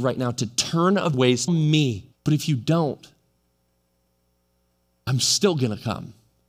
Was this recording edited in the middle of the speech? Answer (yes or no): yes